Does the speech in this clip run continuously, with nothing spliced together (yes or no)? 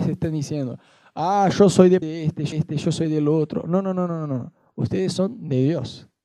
no